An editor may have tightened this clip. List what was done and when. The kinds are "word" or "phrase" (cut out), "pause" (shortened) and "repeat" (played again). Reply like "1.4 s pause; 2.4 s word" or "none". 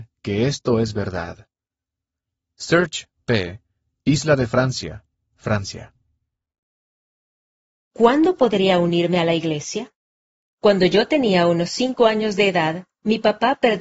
10.2 s pause